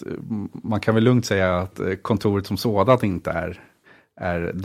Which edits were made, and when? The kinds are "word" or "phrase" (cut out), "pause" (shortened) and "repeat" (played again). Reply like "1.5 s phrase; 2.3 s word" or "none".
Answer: none